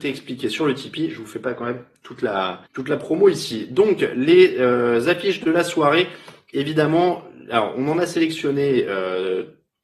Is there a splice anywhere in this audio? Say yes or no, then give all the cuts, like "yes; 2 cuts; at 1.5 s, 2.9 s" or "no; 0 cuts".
yes; 1 cut; at 2.7 s